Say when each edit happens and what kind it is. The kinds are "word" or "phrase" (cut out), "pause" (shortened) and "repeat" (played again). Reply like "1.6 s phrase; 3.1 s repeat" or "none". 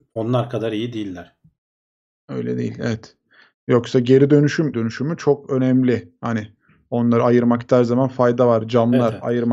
4.7 s phrase